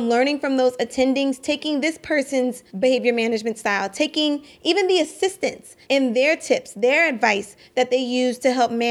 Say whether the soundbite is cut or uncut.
cut